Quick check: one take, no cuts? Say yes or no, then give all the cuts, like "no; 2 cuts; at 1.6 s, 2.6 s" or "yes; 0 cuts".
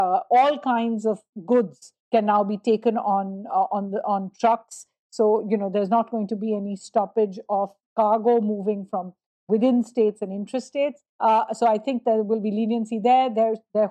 no; 2 cuts; at 2.0 s, 11.1 s